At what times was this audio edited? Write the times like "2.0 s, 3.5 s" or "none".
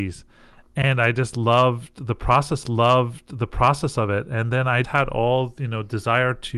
2.6 s, 4.8 s